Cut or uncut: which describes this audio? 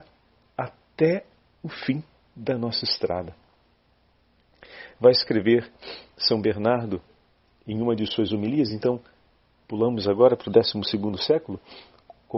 uncut